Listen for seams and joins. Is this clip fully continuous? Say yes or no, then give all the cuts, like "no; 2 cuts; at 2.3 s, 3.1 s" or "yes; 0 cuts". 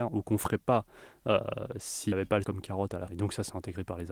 no; 3 cuts; at 2.1 s, 2.4 s, 3.1 s